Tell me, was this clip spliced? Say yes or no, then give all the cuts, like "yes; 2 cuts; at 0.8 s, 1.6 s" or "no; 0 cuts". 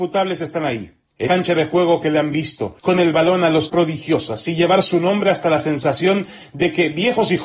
yes; 3 cuts; at 1.3 s, 2.8 s, 3.7 s